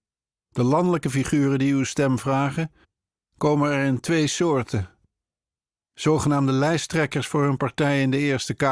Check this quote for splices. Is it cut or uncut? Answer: uncut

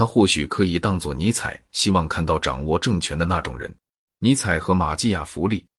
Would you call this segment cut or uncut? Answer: cut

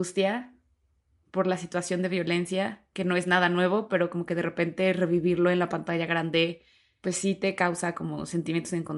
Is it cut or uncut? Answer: uncut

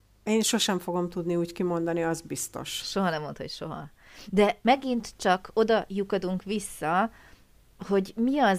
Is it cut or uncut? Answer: uncut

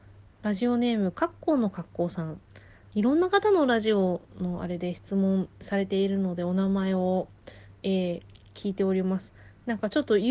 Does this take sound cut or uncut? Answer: uncut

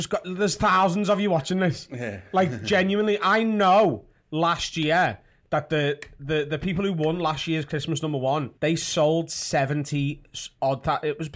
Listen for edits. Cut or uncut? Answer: cut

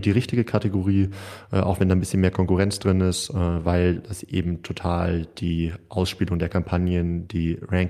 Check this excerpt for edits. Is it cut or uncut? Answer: uncut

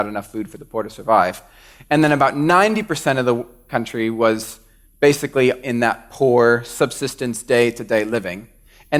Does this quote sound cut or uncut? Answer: uncut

